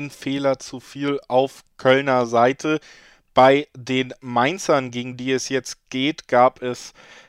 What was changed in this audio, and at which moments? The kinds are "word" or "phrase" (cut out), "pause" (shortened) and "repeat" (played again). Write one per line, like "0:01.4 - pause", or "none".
none